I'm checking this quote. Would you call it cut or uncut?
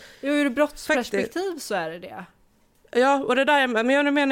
uncut